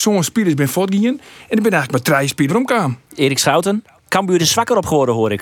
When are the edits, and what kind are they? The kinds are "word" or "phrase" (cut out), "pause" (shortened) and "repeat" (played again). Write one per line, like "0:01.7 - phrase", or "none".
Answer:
0:02.5 - word
0:04.4 - word